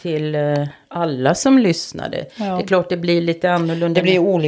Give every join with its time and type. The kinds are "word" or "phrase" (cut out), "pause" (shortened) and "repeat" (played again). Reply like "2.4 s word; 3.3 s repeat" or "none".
none